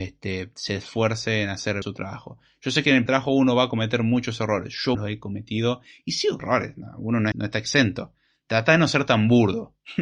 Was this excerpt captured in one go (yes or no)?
no